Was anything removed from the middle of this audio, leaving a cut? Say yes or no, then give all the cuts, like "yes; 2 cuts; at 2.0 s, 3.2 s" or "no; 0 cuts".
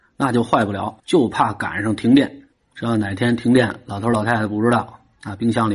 yes; 2 cuts; at 1.0 s, 2.5 s